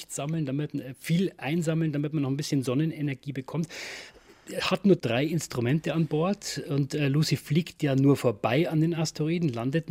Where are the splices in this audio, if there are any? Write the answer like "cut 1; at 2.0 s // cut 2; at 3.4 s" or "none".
none